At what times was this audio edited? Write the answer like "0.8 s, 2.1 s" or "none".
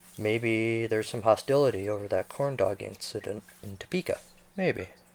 none